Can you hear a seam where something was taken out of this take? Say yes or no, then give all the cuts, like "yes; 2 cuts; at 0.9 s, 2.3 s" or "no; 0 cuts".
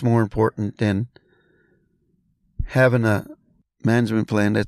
no; 0 cuts